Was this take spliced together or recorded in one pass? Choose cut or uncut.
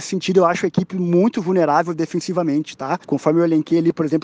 cut